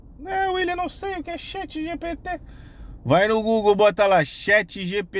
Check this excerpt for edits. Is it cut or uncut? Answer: uncut